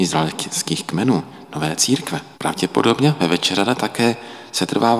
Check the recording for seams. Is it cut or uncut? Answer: cut